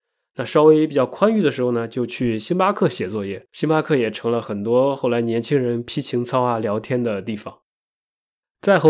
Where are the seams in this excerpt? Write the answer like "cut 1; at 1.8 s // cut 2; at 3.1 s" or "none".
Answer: cut 1; at 3.5 s